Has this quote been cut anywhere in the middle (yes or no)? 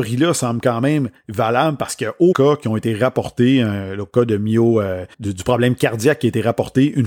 yes